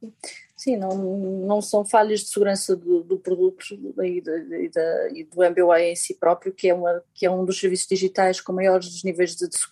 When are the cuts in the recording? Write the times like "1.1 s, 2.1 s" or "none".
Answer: none